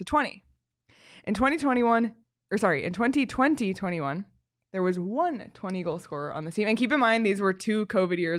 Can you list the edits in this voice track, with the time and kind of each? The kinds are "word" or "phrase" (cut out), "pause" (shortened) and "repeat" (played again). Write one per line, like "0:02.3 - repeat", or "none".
none